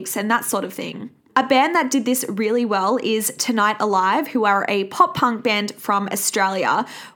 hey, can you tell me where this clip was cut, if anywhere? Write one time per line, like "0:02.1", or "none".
0:01.2